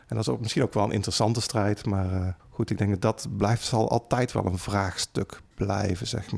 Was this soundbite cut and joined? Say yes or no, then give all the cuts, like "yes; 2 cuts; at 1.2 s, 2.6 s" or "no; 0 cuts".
yes; 1 cut; at 2.4 s